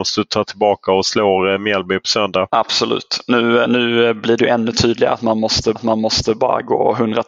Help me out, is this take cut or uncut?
cut